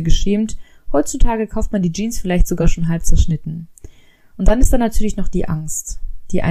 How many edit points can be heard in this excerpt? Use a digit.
0